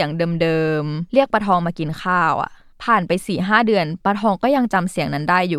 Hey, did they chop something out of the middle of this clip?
yes; 1 cut; at 2.7 s

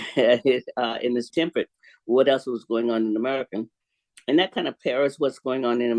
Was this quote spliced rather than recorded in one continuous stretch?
yes; 1 cut; at 1.3 s

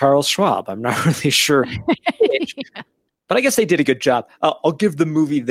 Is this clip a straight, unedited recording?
yes; 0 cuts

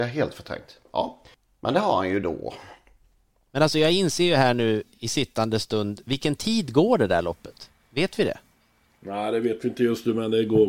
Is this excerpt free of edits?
yes; 0 cuts

